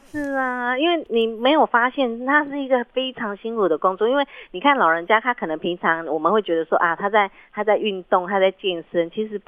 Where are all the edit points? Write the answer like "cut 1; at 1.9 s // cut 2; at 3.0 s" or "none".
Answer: none